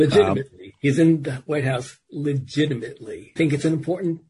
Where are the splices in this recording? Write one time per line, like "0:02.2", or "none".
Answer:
0:03.4